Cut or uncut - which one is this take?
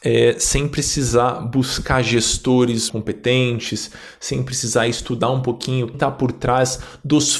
cut